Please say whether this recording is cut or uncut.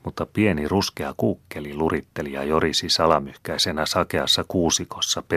uncut